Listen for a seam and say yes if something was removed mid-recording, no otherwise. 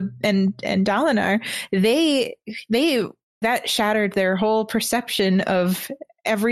yes